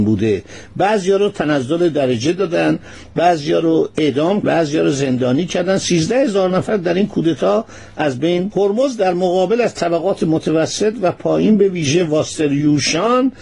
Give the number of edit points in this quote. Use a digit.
2